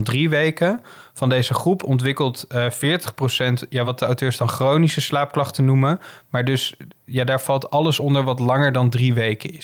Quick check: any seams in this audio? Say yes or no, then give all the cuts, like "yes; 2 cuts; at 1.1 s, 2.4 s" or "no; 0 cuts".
no; 0 cuts